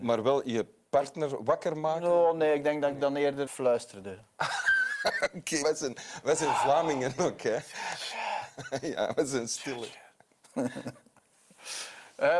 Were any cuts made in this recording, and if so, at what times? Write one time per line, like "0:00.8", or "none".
0:03.5
0:04.3
0:05.6

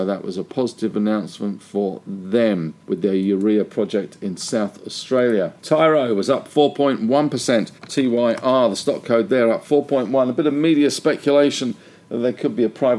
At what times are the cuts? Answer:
0:02.8
0:05.6
0:07.8

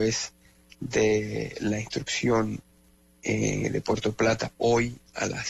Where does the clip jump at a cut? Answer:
none

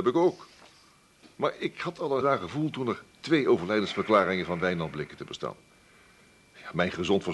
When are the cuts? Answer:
0:02.2

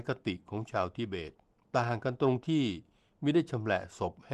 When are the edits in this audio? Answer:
0:01.6

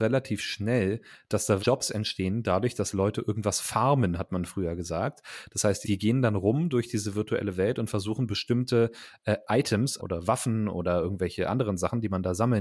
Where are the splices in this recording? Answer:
0:01.6
0:05.8
0:10.0

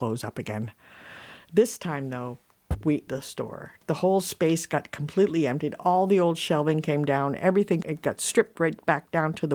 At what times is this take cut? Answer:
0:03.1
0:07.8

